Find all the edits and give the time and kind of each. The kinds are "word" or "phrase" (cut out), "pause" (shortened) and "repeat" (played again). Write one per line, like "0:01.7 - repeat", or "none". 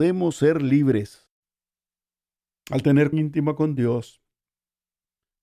0:03.1 - word